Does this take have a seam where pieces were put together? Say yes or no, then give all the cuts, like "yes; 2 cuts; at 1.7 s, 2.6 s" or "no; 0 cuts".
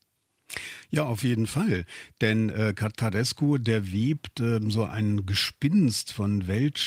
no; 0 cuts